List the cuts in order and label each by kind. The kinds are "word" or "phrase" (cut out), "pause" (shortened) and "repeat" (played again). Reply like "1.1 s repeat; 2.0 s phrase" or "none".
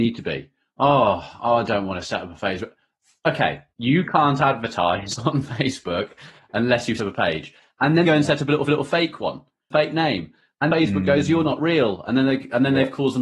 3.7 s pause; 7.0 s word; 8.0 s word; 8.7 s repeat; 9.7 s phrase; 10.7 s word